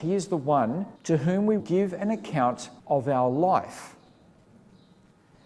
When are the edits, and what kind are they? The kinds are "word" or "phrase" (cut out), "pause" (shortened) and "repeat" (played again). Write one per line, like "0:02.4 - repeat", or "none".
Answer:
0:01.0 - pause
0:01.6 - word
0:02.8 - pause